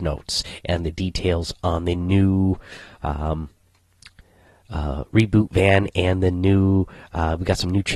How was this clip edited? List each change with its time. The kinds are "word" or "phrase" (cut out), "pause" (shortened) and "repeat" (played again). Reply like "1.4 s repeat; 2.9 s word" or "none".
none